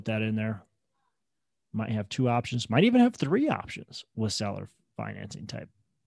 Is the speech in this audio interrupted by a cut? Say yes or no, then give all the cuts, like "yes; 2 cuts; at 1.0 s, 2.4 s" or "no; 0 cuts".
no; 0 cuts